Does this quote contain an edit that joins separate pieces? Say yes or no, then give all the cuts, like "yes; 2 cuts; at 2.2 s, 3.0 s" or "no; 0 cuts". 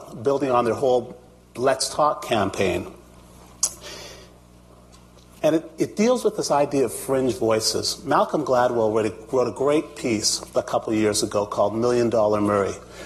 no; 0 cuts